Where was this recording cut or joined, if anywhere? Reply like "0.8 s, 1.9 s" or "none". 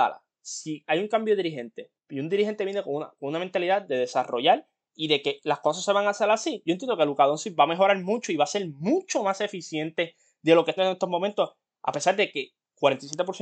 2.0 s, 10.8 s